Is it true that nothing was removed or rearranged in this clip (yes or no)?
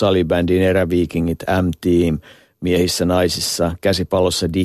yes